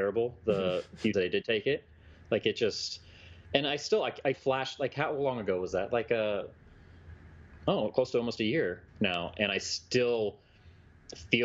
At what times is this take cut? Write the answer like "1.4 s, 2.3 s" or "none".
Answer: 1.1 s, 4.3 s, 8.9 s